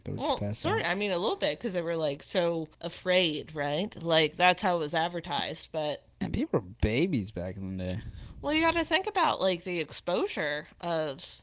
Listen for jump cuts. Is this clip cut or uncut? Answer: cut